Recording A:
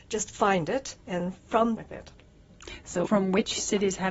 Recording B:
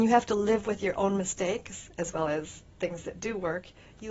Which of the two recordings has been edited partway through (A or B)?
A